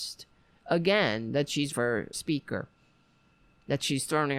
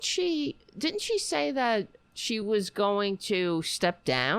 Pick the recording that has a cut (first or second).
first